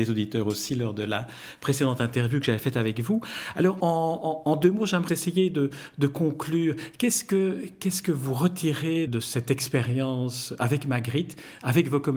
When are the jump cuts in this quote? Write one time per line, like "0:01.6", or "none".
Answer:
0:03.8
0:05.1
0:09.1